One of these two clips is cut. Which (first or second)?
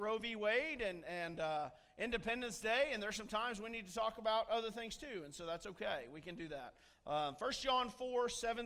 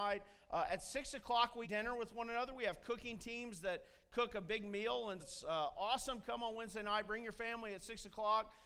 second